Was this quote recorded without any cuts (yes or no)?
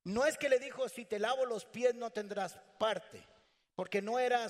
yes